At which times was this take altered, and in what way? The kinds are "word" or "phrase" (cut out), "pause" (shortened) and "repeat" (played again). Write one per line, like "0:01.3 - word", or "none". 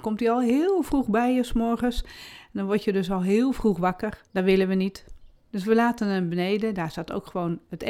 0:04.3 - pause